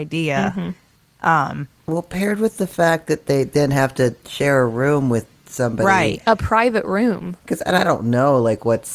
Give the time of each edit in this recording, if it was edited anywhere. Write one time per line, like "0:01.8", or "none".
none